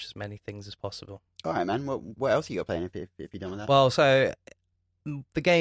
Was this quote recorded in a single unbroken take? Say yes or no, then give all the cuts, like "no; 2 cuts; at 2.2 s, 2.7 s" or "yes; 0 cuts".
yes; 0 cuts